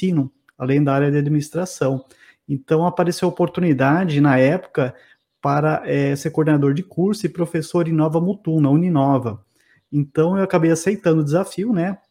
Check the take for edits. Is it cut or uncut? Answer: uncut